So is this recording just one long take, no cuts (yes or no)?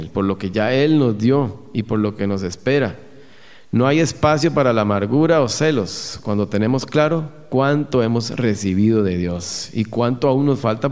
yes